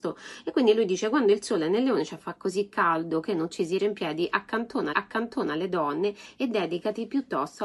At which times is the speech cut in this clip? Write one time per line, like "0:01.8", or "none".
0:03.8
0:04.9